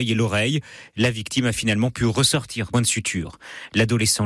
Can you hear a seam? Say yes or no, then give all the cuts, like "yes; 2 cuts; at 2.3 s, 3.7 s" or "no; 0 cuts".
yes; 1 cut; at 2.7 s